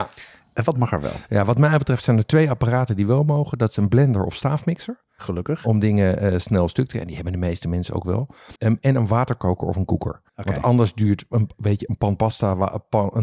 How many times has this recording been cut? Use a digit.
2